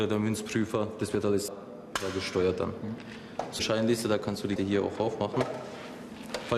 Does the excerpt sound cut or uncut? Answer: cut